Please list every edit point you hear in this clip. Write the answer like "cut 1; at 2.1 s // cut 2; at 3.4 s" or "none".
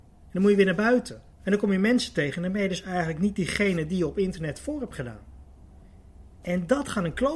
cut 1; at 1.3 s